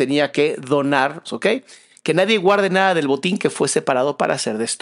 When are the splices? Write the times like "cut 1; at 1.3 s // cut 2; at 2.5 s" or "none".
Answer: cut 1; at 1.2 s